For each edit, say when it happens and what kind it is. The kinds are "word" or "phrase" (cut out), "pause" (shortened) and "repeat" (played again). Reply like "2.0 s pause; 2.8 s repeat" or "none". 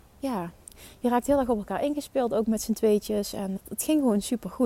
3.6 s word